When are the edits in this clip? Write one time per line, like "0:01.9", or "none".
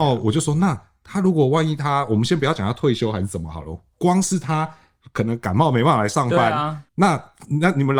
0:06.9

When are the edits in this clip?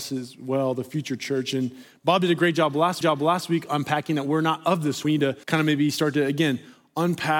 0:03.0
0:05.0
0:05.4

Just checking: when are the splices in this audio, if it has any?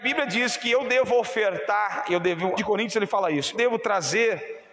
0:02.6
0:03.5

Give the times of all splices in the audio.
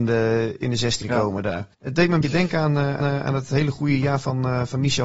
0:01.0
0:01.7
0:02.2
0:03.0

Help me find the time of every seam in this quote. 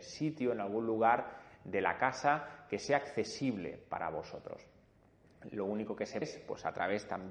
0:06.2

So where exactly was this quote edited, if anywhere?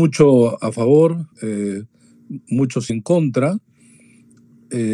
0:01.3
0:02.9

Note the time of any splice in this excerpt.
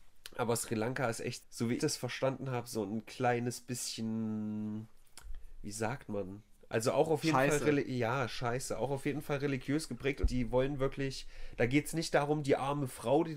0:01.4
0:01.8
0:10.2

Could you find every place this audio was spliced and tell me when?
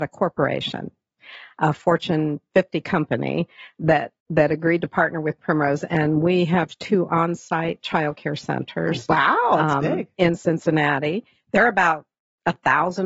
0:04.2

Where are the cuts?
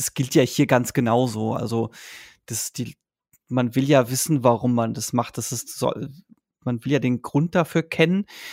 none

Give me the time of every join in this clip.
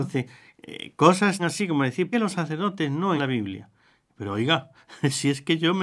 0:01.4
0:02.1
0:03.2

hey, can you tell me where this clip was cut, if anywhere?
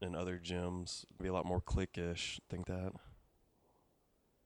0:01.2
0:02.6

